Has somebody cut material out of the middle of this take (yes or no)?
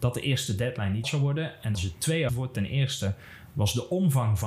yes